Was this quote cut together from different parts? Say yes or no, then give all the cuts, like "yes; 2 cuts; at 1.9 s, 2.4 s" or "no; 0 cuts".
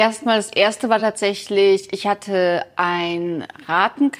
no; 0 cuts